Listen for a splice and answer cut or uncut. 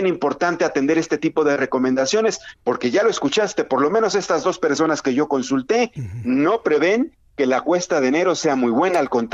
uncut